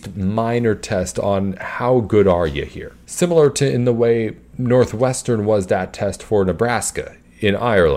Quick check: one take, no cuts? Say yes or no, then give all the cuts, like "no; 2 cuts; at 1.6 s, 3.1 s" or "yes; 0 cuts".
no; 1 cut; at 3.0 s